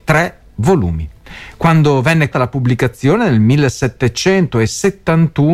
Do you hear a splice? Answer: yes; 1 cut; at 2.3 s

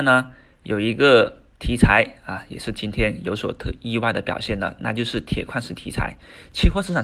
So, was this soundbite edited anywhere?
no; 0 cuts

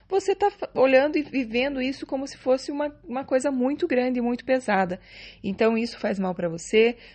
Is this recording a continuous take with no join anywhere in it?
yes; 0 cuts

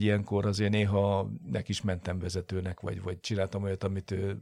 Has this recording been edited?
no; 0 cuts

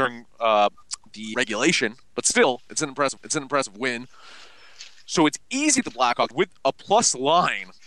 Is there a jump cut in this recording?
yes; 5 cuts; at 1.3 s, 2.0 s, 3.2 s, 5.8 s, 6.3 s

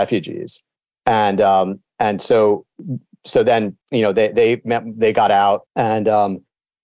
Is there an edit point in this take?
yes; 2 cuts; at 3.8 s, 5.7 s

